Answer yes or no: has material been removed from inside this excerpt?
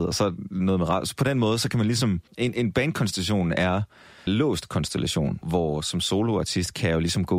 yes